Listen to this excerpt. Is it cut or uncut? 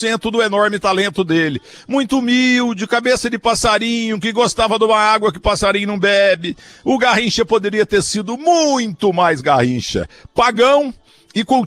uncut